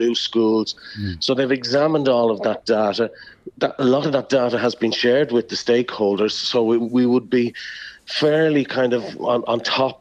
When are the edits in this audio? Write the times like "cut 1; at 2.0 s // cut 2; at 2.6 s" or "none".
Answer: cut 1; at 6.8 s